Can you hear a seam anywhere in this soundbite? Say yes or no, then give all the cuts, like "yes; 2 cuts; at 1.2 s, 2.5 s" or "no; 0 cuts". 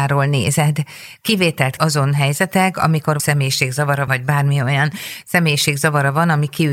yes; 3 cuts; at 1.8 s, 3.2 s, 4.1 s